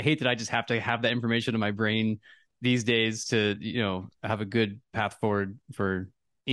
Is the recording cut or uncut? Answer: uncut